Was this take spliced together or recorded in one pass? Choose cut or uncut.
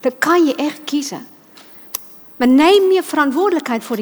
uncut